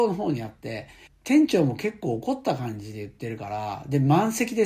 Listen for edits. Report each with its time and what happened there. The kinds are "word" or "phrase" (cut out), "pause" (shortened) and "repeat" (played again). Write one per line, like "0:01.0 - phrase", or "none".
0:01.1 - word

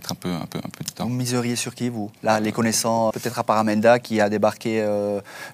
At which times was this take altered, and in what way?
0:02.2 - pause
0:03.1 - word

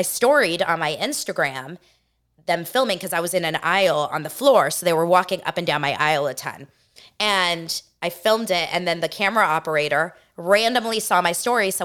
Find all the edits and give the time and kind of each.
none

